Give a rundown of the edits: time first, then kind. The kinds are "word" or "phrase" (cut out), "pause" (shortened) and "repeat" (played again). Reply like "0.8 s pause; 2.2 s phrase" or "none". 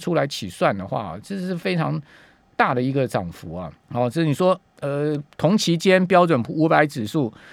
3.8 s pause; 4.7 s pause